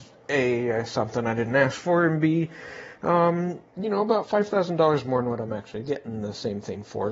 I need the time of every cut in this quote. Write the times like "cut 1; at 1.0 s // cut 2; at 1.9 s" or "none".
none